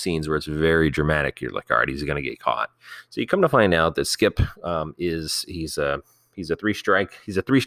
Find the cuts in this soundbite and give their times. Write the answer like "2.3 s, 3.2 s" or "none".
none